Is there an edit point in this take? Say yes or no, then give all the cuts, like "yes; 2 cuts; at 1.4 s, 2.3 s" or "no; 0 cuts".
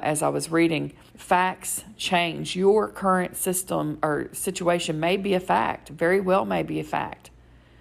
yes; 1 cut; at 1.1 s